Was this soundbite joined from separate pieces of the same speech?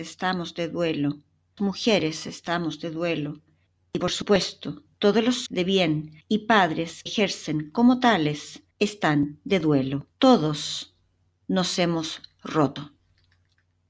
yes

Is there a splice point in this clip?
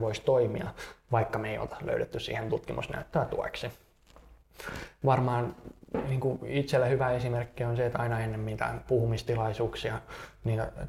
no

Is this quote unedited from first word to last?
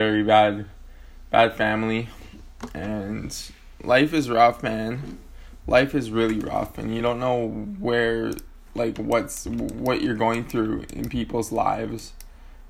yes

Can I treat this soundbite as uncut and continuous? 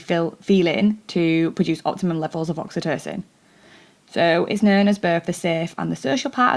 yes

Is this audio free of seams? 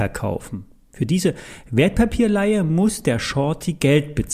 yes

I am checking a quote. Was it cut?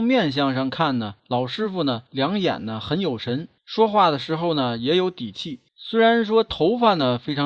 yes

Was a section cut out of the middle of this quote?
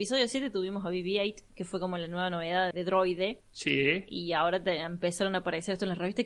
yes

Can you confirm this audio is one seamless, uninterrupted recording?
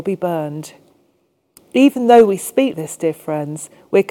no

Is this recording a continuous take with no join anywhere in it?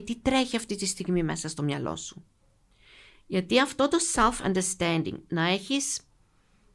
yes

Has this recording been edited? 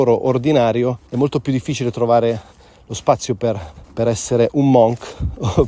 yes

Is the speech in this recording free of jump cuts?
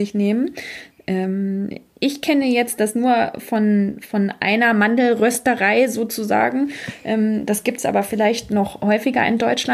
yes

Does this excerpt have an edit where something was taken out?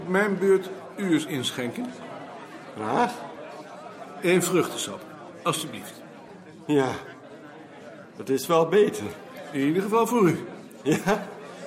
no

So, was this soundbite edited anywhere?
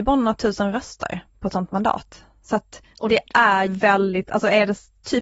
yes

